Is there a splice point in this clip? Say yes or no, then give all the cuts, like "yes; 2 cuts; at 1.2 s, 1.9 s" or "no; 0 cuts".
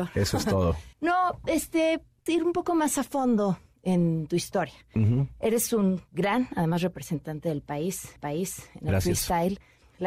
yes; 3 cuts; at 0.9 s, 2.3 s, 8.2 s